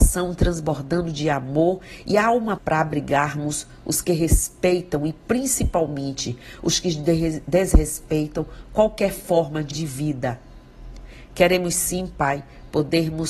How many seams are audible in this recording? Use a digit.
2